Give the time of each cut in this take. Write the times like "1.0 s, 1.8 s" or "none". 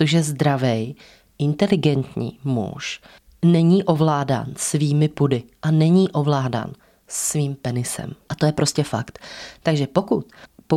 none